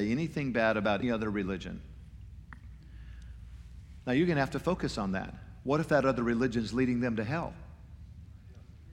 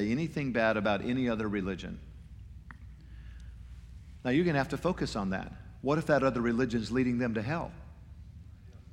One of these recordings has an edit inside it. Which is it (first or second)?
first